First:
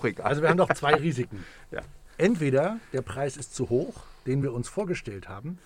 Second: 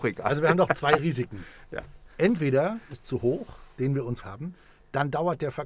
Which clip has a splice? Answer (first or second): second